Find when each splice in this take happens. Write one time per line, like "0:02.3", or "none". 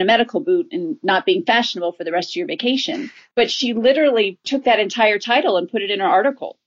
none